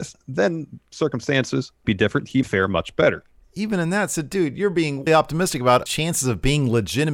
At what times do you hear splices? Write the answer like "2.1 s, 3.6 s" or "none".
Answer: 1.8 s, 2.4 s, 5.1 s, 5.9 s